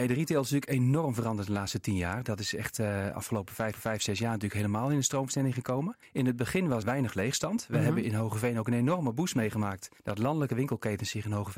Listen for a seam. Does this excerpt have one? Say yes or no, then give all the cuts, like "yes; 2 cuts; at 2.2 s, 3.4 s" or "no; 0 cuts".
yes; 4 cuts; at 3.7 s, 6.0 s, 6.8 s, 10.0 s